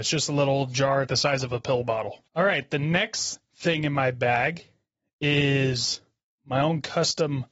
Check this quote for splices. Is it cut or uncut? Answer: cut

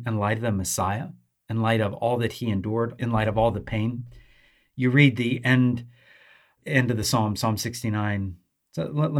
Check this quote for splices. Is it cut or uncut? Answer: uncut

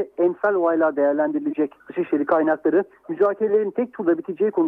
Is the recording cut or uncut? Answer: cut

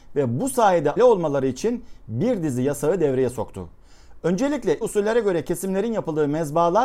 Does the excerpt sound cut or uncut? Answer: cut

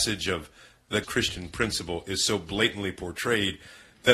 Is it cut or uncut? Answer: cut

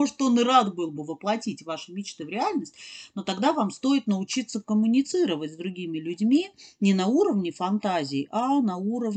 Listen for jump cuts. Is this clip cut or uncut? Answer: uncut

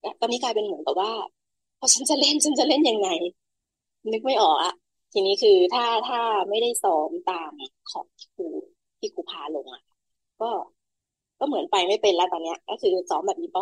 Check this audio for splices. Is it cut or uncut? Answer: uncut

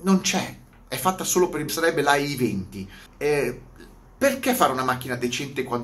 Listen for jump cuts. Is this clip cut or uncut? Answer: cut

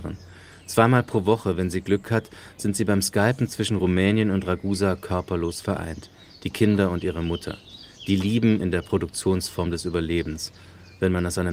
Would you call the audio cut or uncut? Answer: uncut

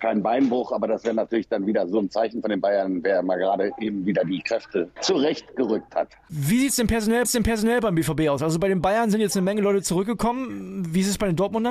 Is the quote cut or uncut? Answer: cut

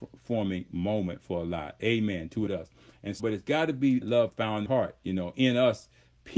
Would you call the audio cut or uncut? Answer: cut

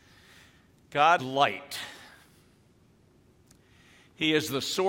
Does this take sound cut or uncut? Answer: cut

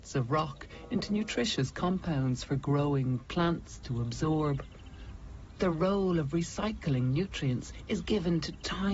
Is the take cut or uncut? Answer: uncut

